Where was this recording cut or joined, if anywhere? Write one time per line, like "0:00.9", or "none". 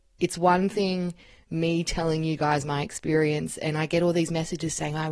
none